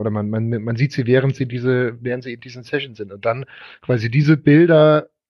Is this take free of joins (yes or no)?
yes